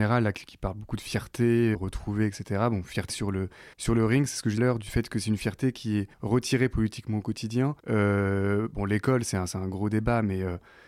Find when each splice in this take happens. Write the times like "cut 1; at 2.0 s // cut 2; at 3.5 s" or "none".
cut 1; at 1.7 s // cut 2; at 3.1 s // cut 3; at 3.7 s // cut 4; at 4.6 s // cut 5; at 6.1 s // cut 6; at 7.8 s